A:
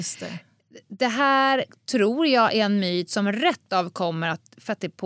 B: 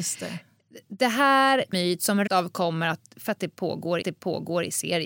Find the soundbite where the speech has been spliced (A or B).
B